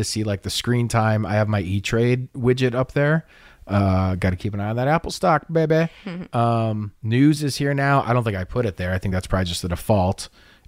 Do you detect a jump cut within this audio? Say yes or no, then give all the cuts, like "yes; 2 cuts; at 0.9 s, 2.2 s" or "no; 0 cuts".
no; 0 cuts